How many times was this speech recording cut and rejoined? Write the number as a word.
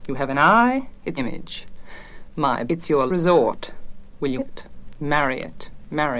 four